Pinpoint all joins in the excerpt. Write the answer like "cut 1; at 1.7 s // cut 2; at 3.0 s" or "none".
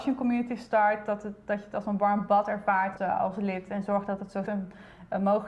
cut 1; at 3.0 s // cut 2; at 4.5 s